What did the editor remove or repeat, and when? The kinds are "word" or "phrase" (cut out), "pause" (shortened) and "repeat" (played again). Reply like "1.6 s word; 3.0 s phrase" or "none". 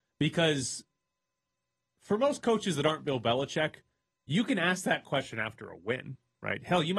none